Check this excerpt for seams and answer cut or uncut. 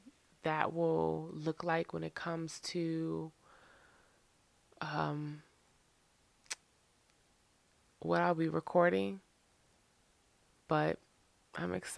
uncut